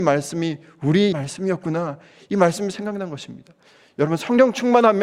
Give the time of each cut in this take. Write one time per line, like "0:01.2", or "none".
0:01.1

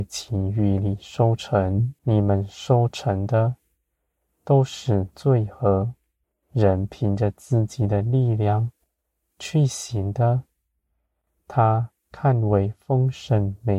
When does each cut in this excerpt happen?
0:02.0
0:06.2

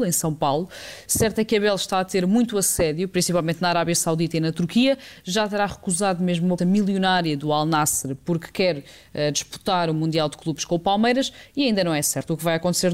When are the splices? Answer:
0:06.6

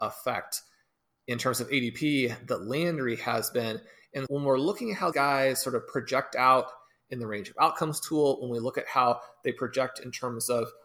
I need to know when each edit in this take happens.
0:04.3
0:05.1

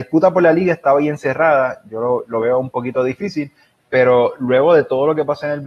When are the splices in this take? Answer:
none

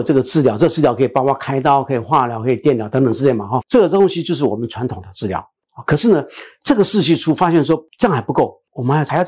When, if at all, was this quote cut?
0:03.6

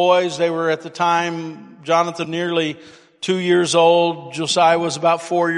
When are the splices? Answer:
0:02.2

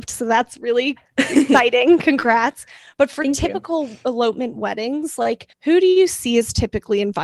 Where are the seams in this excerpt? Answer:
0:05.5

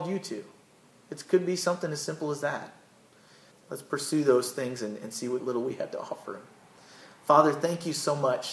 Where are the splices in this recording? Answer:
0:03.5
0:05.4

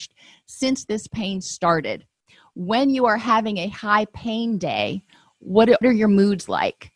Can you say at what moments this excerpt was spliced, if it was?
0:05.8

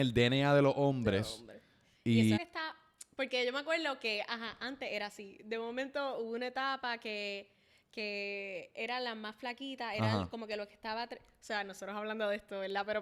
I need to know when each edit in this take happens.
0:02.4

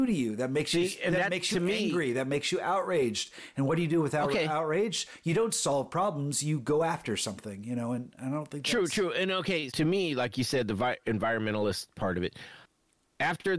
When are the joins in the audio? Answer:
0:09.7

